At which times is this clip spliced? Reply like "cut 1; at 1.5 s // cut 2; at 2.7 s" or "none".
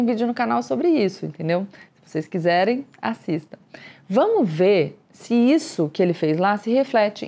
none